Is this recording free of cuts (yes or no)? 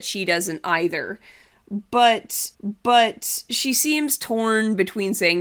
no